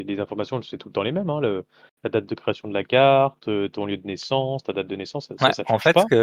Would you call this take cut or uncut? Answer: uncut